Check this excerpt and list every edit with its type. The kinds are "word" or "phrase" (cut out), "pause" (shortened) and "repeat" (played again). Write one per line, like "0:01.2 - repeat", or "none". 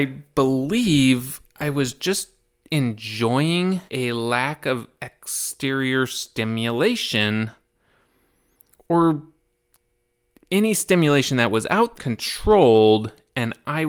0:03.9 - pause
0:12.0 - phrase